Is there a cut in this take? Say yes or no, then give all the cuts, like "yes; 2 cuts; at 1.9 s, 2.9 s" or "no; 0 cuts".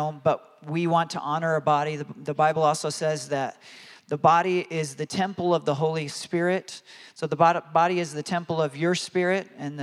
no; 0 cuts